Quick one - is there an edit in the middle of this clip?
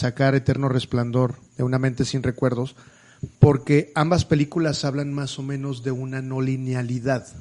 yes; 2 cuts; at 1.5 s, 3.3 s

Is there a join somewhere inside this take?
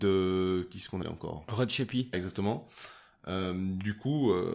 yes; 2 cuts; at 1.0 s, 2.1 s

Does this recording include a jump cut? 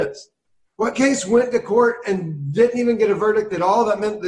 no; 0 cuts

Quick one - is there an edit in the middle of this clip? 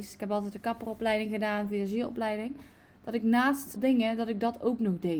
yes; 1 cut; at 3.8 s

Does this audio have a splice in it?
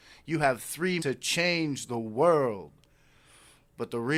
yes; 1 cut; at 1.0 s

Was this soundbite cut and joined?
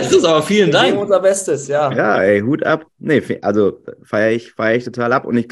no; 0 cuts

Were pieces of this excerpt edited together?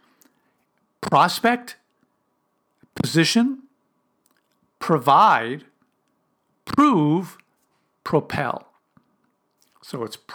no; 0 cuts

